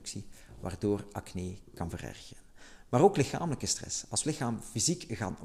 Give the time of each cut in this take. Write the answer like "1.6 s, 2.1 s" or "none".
4.2 s